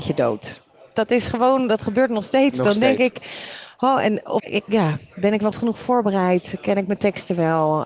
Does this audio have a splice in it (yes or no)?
yes